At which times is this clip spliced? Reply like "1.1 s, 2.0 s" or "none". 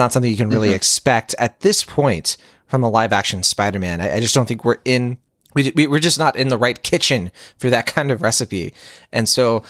none